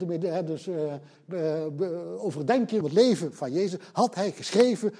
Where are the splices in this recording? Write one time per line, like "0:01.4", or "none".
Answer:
0:02.8

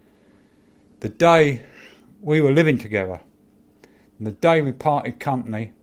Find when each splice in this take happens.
none

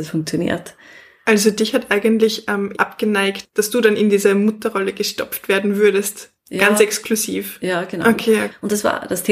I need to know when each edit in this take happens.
0:02.7

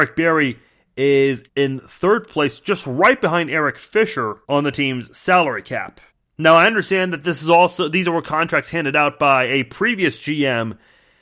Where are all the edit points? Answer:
0:01.5
0:04.4
0:06.1

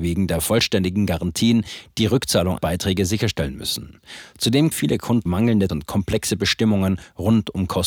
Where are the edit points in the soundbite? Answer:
0:02.6
0:04.7
0:05.3
0:05.7

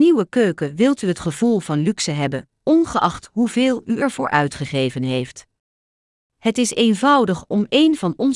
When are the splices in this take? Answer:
none

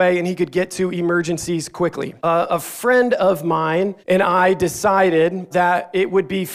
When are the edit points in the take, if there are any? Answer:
0:02.2
0:04.0
0:05.5

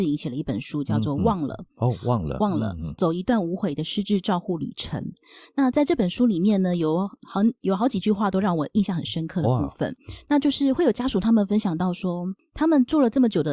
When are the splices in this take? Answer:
none

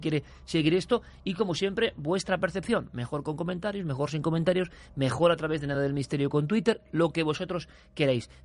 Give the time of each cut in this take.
none

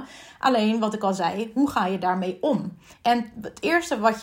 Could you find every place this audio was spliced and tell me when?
0:02.9

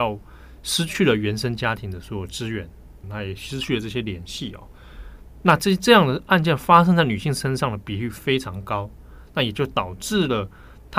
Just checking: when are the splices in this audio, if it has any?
0:03.0

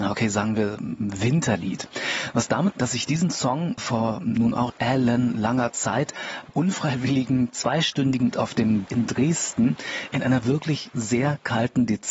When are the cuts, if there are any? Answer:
0:02.7
0:03.8
0:04.7
0:06.5
0:08.3
0:08.9

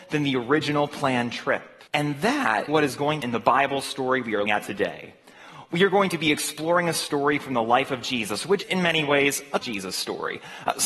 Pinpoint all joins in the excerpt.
0:01.9
0:02.7
0:03.2
0:04.5
0:08.6
0:09.6

